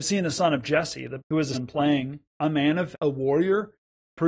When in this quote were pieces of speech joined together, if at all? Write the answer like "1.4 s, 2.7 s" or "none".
1.2 s, 1.5 s, 2.3 s, 2.9 s

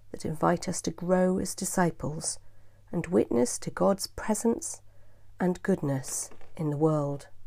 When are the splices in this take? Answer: none

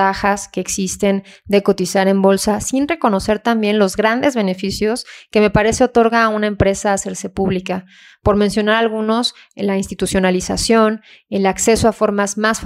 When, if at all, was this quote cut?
none

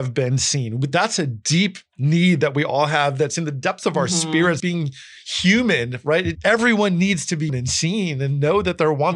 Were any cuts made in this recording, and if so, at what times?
4.6 s, 6.3 s, 7.5 s

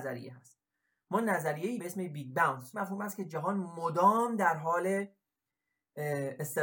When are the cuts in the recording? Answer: 1.8 s, 2.7 s

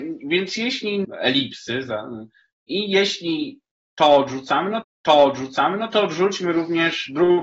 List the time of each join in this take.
1.0 s, 4.8 s

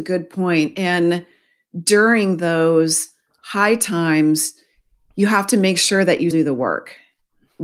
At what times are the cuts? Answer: 6.3 s

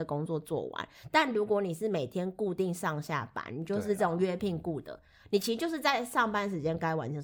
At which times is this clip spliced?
none

